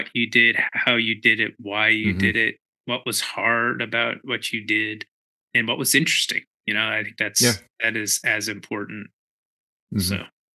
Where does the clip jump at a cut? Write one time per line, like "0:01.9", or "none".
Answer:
none